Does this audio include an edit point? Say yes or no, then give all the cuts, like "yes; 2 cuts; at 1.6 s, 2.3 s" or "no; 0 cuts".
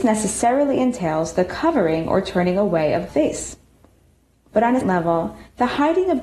yes; 2 cuts; at 3.1 s, 4.8 s